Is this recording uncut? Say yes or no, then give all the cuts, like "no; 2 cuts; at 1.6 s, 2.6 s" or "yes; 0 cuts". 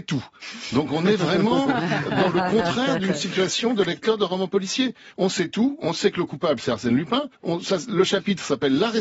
no; 1 cut; at 7.3 s